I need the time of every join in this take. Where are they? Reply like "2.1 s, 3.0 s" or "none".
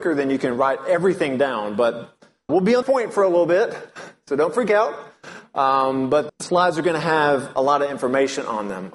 2.5 s, 2.8 s, 6.3 s